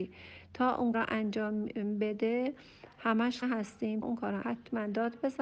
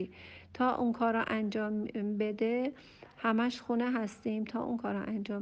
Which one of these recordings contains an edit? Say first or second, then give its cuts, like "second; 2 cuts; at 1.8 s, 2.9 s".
first; 4 cuts; at 0.9 s, 3.4 s, 4.0 s, 4.4 s